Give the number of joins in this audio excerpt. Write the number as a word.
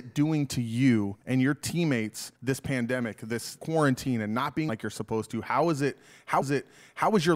five